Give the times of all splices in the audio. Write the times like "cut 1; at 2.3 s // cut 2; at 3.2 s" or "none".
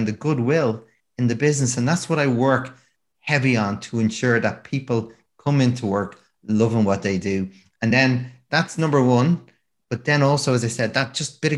none